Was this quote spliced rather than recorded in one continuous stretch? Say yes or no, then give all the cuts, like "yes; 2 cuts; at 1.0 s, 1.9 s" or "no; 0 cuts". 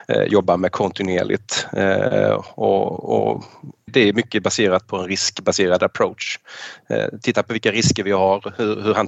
yes; 1 cut; at 3.9 s